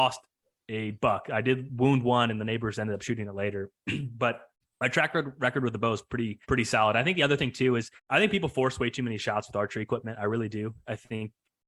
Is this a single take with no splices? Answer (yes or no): no